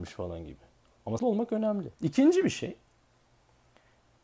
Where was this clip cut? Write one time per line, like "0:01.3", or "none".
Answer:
0:01.2
0:01.9